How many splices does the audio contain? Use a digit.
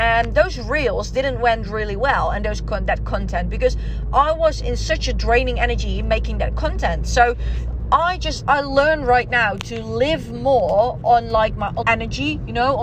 2